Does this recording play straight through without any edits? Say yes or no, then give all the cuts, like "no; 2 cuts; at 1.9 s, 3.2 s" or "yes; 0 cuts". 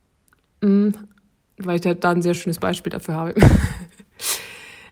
yes; 0 cuts